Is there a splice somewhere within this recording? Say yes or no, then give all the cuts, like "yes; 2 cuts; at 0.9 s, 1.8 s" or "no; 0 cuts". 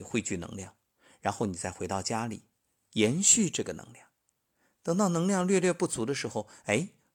no; 0 cuts